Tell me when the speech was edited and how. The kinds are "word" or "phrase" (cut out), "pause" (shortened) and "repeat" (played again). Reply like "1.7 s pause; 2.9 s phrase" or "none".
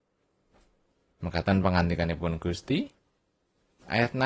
none